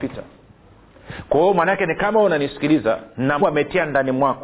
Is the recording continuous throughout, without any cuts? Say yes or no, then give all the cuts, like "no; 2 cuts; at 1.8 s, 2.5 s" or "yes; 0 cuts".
no; 1 cut; at 3.4 s